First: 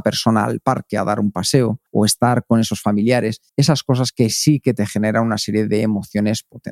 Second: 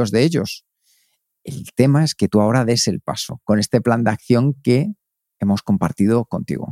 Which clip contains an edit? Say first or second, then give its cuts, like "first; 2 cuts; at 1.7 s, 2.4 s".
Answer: first; 2 cuts; at 1.9 s, 3.5 s